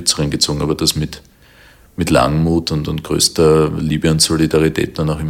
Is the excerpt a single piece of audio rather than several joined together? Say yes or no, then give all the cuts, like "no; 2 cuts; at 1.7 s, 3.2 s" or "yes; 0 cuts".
yes; 0 cuts